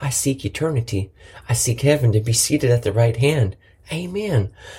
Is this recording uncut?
yes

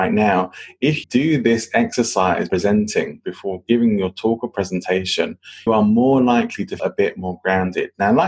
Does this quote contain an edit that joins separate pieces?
yes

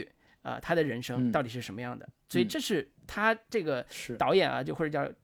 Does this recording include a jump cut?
yes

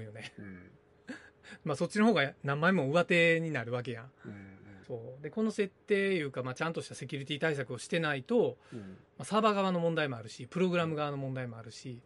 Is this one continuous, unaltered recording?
no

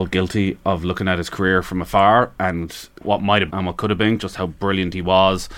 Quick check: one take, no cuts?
no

